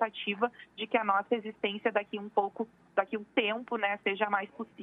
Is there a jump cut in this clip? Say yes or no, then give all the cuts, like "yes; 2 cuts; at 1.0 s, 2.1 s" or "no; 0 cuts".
no; 0 cuts